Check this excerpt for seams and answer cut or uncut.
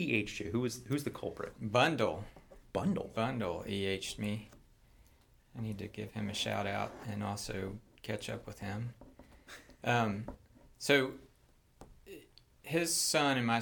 uncut